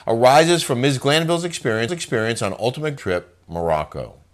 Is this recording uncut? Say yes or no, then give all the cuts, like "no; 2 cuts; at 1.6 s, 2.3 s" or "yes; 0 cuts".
no; 2 cuts; at 1.9 s, 3.0 s